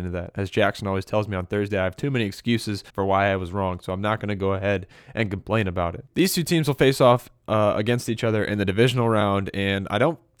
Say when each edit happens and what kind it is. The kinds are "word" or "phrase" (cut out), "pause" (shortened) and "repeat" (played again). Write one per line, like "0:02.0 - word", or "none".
0:02.9 - pause
0:06.1 - pause